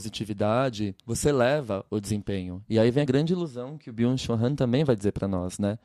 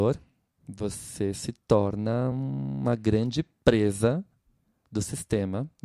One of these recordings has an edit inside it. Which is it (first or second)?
first